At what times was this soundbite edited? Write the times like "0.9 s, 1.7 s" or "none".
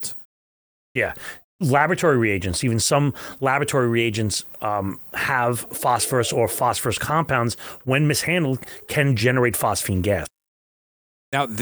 none